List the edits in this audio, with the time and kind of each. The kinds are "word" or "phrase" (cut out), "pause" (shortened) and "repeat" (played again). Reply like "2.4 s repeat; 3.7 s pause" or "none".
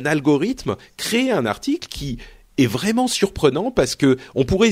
none